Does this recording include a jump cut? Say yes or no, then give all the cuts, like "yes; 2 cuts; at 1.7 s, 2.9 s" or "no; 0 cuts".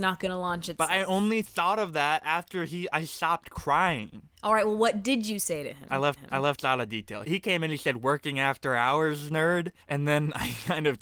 yes; 4 cuts; at 4.3 s, 6.2 s, 7.2 s, 9.8 s